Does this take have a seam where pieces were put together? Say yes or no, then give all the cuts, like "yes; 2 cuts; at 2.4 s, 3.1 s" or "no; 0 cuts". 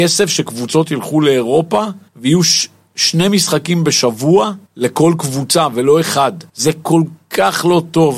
yes; 3 cuts; at 2.1 s, 4.7 s, 6.5 s